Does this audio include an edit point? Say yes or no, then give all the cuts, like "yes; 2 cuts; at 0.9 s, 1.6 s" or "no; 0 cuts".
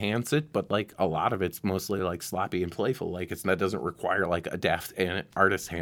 no; 0 cuts